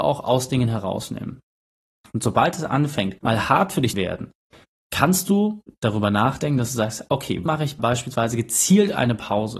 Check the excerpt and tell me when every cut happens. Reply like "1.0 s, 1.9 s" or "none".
3.2 s, 3.9 s, 7.5 s, 7.8 s